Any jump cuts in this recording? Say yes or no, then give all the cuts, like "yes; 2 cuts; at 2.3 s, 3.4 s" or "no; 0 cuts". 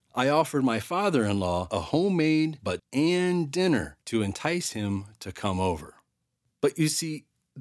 yes; 2 cuts; at 2.8 s, 4.0 s